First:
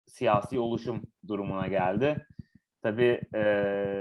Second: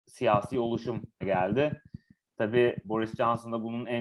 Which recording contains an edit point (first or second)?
second